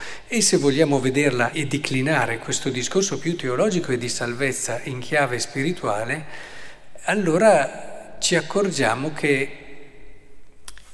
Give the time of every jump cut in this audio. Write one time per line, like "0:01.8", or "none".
0:01.5